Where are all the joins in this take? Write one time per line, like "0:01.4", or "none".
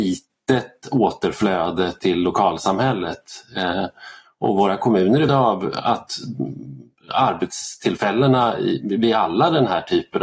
0:05.3